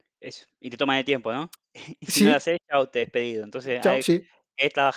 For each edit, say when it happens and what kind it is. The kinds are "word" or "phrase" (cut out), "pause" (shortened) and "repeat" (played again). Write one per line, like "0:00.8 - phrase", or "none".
0:03.0 - word
0:04.0 - word